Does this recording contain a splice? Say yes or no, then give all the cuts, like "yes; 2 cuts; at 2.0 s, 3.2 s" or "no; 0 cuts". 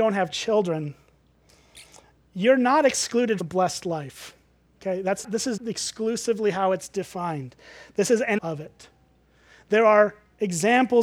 yes; 4 cuts; at 3.4 s, 5.2 s, 5.6 s, 8.4 s